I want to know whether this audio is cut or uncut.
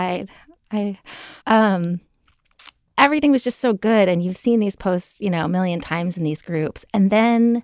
cut